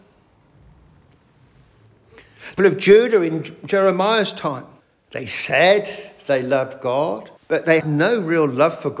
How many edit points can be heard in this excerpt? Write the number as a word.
four